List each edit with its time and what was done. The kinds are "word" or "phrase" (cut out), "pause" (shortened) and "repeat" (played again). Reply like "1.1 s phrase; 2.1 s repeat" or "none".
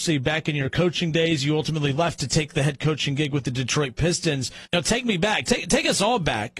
none

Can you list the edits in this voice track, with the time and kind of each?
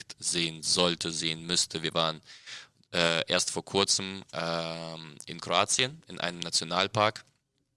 none

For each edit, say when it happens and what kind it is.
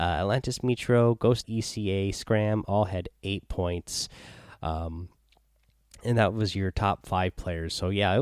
1.4 s word

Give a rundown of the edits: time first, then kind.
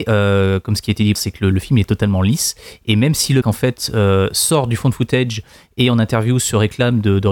1.2 s word; 1.5 s word; 3.4 s word

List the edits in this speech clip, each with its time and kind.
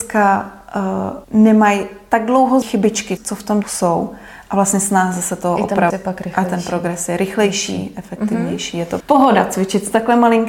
1.2 s pause; 2.6 s phrase; 3.2 s word; 3.6 s word; 5.9 s word; 9.0 s word

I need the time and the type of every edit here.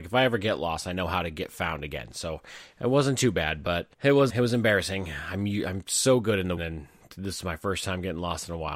3.9 s pause; 4.3 s word; 6.6 s phrase

